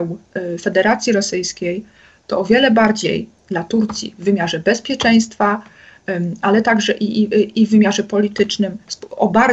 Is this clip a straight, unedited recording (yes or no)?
yes